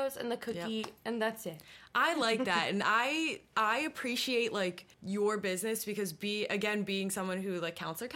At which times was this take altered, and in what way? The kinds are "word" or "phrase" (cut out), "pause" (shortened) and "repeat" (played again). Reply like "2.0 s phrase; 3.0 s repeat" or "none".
4.9 s pause